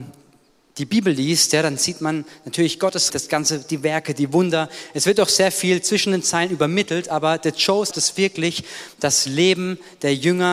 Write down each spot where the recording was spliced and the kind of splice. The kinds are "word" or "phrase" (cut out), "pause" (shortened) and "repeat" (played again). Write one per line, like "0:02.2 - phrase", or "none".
0:03.1 - word
0:07.9 - word